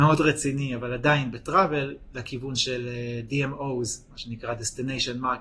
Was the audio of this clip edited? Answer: no; 0 cuts

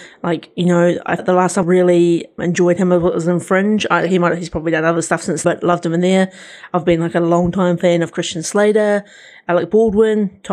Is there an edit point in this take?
yes; 4 cuts; at 1.2 s, 1.6 s, 2.4 s, 5.4 s

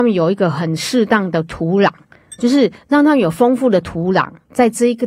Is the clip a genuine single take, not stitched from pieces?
yes; 0 cuts

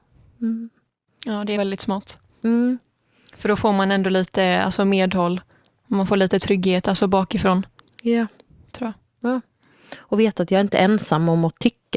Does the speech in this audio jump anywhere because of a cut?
yes; 1 cut; at 1.6 s

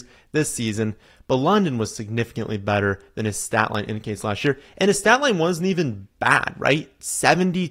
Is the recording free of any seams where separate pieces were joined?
yes; 0 cuts

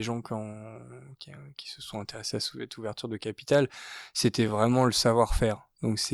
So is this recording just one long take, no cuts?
yes; 0 cuts

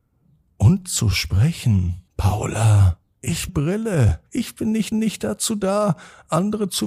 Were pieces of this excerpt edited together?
yes; 4 cuts; at 2.1 s, 3.5 s, 4.3 s, 4.9 s

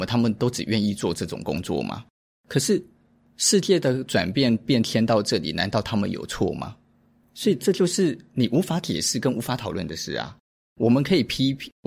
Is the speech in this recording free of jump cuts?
yes; 0 cuts

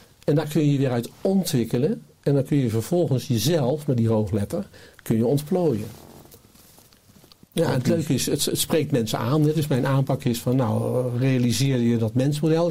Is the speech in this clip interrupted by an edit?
no; 0 cuts

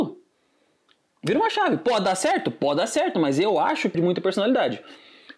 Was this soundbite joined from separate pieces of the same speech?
yes; 1 cut; at 3.9 s

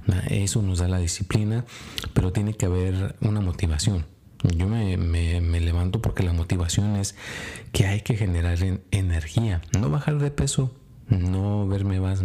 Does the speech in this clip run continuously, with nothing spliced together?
yes; 0 cuts

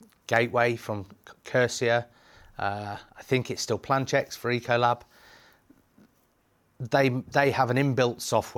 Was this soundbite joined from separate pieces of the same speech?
no; 0 cuts

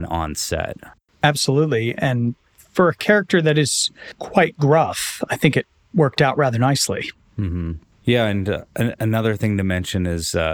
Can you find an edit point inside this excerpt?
no; 0 cuts

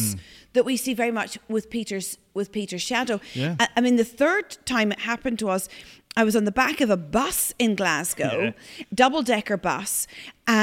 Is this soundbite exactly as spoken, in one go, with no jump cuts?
yes; 0 cuts

